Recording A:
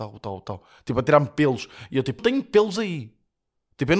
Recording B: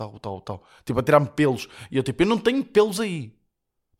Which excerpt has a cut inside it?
A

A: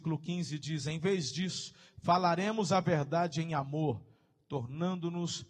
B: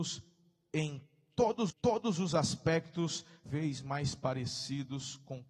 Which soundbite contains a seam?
B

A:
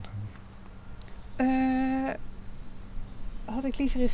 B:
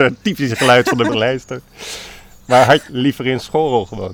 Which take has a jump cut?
B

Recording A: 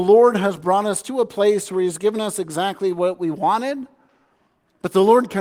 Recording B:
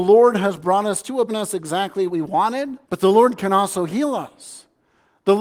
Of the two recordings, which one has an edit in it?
B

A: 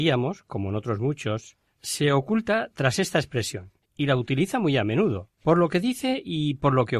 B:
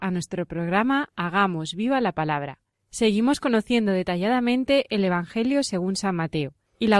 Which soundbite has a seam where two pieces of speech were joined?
A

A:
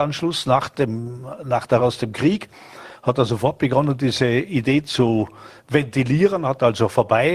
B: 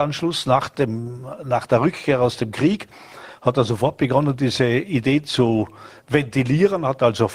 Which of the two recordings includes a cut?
A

